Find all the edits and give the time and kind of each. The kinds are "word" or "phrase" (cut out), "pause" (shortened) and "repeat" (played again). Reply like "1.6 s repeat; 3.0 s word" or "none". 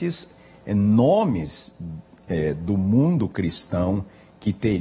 none

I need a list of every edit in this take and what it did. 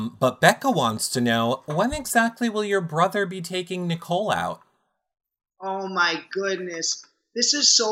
none

